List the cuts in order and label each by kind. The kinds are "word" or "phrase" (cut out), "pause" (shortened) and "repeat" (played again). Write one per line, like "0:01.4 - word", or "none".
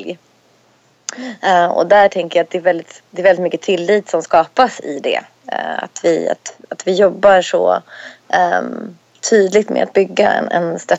none